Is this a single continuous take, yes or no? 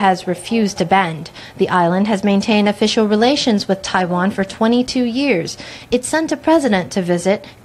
yes